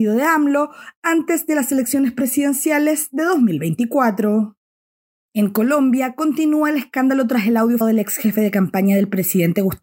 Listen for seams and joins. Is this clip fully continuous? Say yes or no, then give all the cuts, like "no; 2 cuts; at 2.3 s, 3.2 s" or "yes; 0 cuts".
no; 1 cut; at 7.8 s